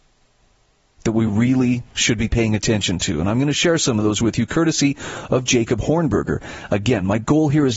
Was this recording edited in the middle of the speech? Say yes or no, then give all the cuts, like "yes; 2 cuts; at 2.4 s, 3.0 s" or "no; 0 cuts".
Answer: no; 0 cuts